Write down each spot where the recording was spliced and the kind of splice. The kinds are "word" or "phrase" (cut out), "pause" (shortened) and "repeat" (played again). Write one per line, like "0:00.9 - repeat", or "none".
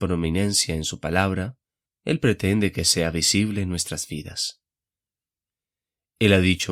none